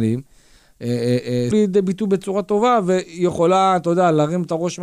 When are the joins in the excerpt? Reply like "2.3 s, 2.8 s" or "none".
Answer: 1.5 s